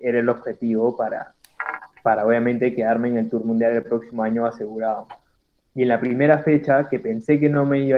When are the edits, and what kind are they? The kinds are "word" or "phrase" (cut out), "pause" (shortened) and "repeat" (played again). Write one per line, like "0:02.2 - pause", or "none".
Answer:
none